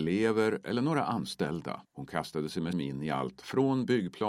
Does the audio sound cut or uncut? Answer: cut